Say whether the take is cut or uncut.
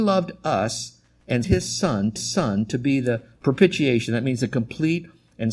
cut